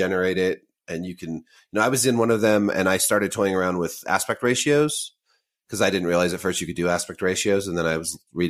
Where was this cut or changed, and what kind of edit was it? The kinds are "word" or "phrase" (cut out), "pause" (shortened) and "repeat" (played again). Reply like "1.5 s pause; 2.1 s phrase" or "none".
none